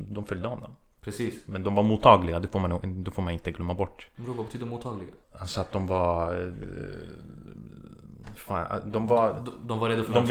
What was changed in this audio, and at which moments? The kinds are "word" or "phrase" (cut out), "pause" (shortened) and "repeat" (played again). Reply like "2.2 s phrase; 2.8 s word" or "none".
5.2 s pause

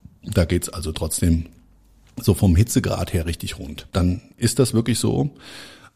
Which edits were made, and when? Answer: none

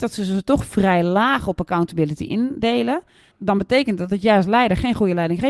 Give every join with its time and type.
none

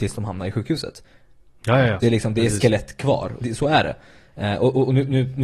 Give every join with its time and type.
2.0 s phrase; 3.4 s word

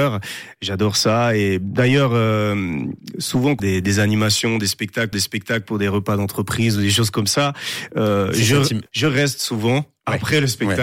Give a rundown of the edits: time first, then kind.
3.6 s phrase; 5.1 s repeat; 8.9 s pause

